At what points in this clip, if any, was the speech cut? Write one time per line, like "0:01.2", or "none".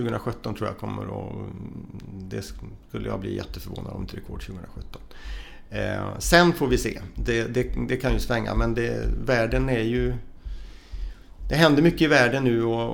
0:04.1